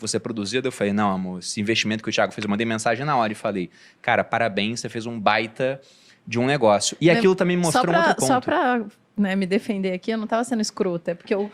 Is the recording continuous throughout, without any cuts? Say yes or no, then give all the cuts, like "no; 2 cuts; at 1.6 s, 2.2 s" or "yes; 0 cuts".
yes; 0 cuts